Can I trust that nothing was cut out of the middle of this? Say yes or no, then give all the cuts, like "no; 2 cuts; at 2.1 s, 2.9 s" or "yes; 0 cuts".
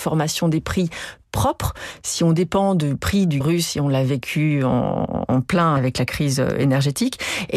no; 1 cut; at 3.4 s